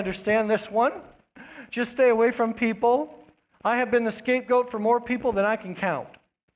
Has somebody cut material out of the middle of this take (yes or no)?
no